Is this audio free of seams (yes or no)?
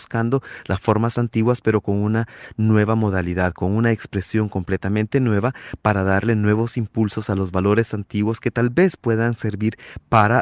yes